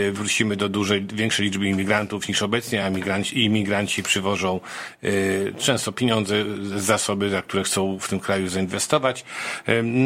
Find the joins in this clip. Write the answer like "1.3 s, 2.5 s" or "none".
none